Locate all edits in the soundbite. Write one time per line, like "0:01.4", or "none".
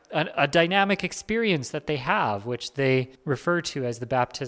0:03.1